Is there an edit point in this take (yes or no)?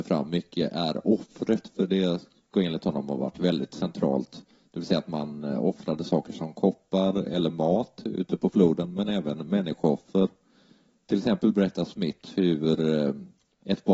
no